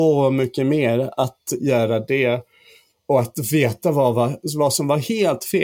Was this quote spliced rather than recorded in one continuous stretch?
no; 0 cuts

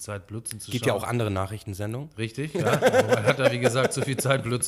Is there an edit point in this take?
no; 0 cuts

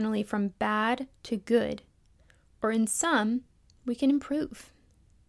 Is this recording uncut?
yes; 0 cuts

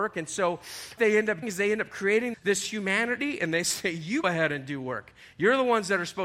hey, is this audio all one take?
no; 4 cuts; at 1.0 s, 1.4 s, 2.3 s, 4.2 s

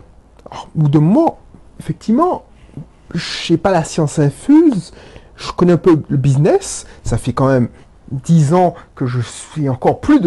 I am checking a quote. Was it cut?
no; 0 cuts

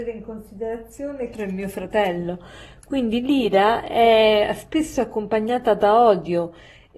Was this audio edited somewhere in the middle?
yes; 1 cut; at 1.3 s

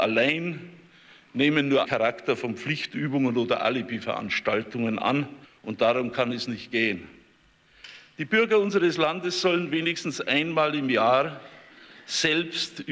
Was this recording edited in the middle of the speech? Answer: yes; 2 cuts; at 1.8 s, 5.4 s

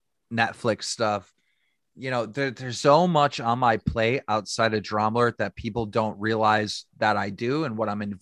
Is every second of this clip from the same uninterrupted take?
no; 1 cut; at 2.8 s

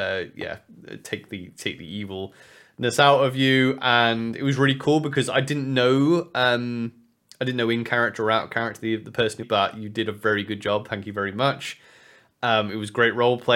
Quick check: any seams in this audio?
yes; 1 cut; at 9.4 s

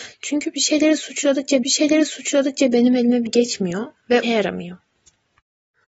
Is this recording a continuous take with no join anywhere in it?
no; 3 cuts; at 1.6 s, 3.3 s, 4.2 s

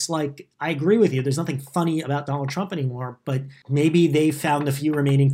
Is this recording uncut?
yes; 0 cuts

